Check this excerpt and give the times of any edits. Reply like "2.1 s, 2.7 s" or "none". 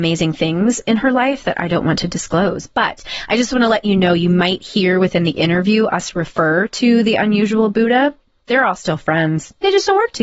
none